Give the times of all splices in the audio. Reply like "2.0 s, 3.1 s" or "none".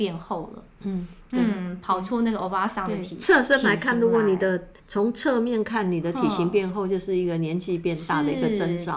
4.8 s